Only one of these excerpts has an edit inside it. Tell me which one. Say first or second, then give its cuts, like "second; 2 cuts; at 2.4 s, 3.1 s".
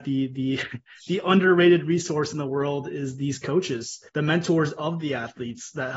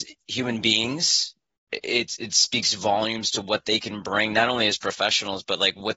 first; 1 cut; at 4.1 s